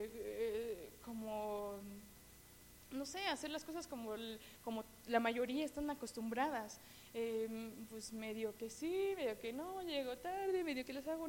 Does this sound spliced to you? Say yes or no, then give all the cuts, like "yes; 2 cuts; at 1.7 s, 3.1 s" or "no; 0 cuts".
no; 0 cuts